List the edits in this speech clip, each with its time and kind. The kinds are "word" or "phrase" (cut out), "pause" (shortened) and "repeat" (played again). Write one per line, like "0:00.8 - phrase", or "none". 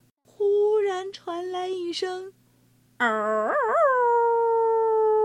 0:02.4 - pause